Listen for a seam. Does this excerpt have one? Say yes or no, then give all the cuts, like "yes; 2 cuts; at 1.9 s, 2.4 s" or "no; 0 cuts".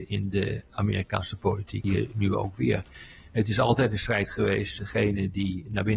yes; 2 cuts; at 1.8 s, 4.8 s